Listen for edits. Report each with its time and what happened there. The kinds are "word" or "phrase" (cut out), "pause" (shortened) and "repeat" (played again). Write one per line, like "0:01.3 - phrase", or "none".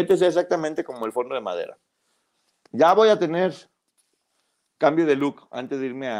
none